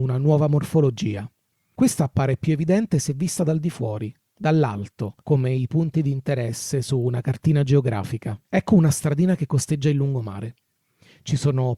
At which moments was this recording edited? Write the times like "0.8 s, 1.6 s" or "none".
5.2 s, 8.4 s